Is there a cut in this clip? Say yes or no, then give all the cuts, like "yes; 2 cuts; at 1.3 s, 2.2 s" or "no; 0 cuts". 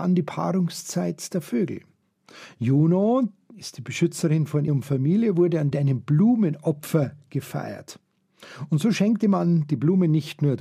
yes; 2 cuts; at 4.7 s, 5.7 s